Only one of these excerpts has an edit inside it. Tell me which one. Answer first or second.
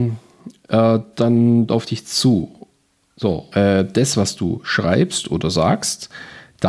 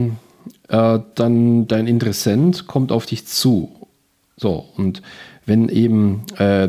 first